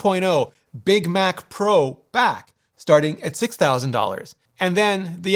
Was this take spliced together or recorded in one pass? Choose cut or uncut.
uncut